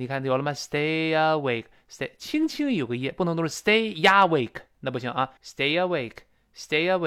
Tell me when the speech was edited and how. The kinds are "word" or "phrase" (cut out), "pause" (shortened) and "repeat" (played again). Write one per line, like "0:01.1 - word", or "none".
0:05.4 - pause